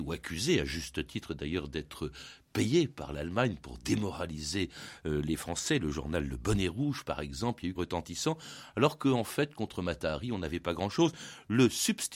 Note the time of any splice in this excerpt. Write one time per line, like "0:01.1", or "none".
0:07.8